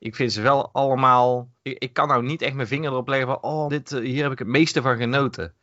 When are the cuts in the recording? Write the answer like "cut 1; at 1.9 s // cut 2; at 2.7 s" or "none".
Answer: cut 1; at 1.6 s // cut 2; at 3.7 s